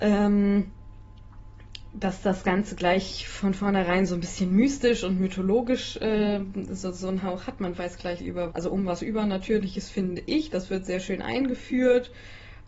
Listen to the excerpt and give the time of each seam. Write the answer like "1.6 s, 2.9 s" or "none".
8.2 s, 8.5 s